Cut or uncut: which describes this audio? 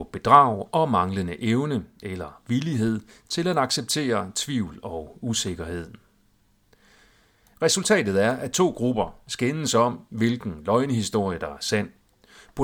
uncut